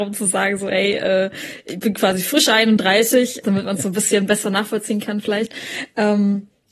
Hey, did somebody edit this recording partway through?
yes; 1 cut; at 3.4 s

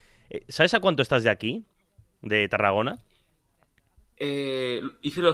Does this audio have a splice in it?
no; 0 cuts

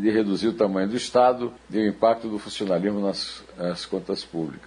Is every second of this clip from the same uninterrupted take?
no; 1 cut; at 1.6 s

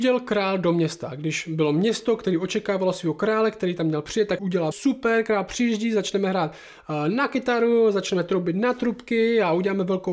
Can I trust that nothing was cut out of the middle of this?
no; 2 cuts; at 4.4 s, 4.7 s

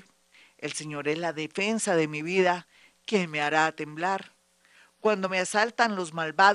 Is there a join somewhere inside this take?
no; 0 cuts

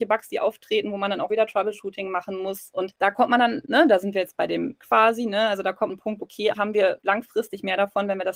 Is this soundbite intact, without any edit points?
no; 5 cuts; at 1.3 s, 4.8 s, 5.9 s, 6.2 s, 6.5 s

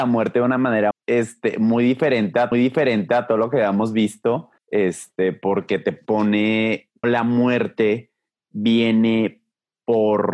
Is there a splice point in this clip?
yes; 4 cuts; at 0.9 s, 2.5 s, 4.6 s, 7.0 s

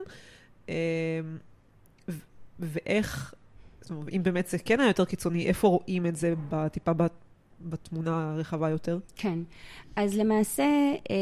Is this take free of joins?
yes; 0 cuts

